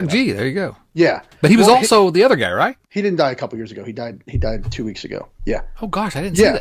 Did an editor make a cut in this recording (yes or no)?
yes